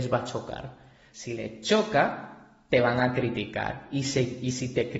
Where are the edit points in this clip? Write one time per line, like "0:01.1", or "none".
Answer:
none